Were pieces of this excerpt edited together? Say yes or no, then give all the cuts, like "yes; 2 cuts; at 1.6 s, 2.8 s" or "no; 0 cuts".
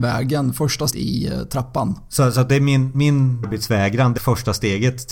yes; 4 cuts; at 0.9 s, 2.9 s, 3.4 s, 4.2 s